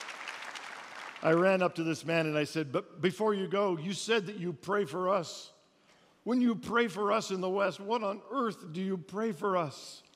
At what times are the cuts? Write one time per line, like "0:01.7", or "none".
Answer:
none